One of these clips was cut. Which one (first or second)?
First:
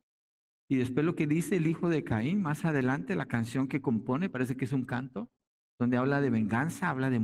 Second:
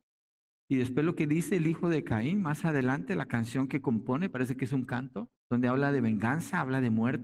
second